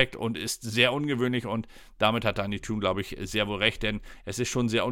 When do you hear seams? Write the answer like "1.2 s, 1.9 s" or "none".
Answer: none